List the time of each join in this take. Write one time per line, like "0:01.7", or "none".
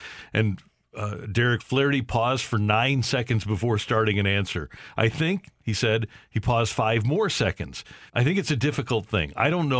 0:01.6
0:08.1